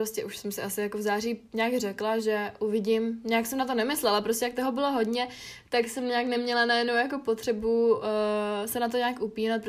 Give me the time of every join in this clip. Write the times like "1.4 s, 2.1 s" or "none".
none